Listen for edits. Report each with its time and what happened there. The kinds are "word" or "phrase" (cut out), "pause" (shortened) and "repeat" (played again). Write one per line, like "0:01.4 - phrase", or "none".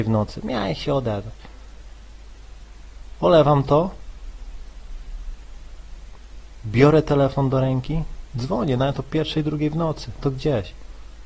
0:10.2 - word